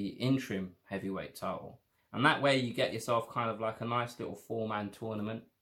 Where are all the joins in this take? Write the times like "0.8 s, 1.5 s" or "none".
2.0 s